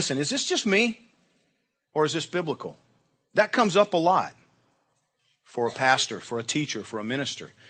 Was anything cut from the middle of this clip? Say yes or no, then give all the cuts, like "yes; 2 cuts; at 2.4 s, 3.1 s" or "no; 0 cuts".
no; 0 cuts